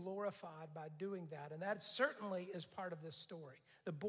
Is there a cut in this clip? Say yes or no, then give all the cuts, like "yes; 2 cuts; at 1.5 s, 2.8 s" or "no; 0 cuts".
no; 0 cuts